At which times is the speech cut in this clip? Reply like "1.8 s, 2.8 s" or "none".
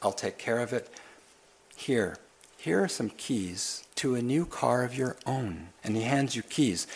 2.2 s, 3.9 s, 5.8 s